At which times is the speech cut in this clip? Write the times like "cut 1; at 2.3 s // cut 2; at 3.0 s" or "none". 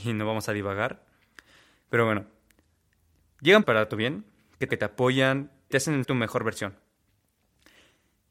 cut 1; at 3.6 s // cut 2; at 4.7 s // cut 3; at 5.7 s // cut 4; at 6.0 s